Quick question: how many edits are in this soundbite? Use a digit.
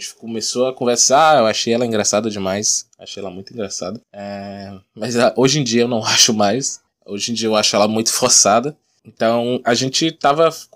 2